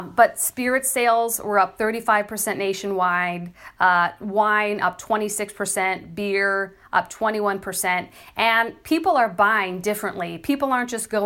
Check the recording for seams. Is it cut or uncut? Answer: uncut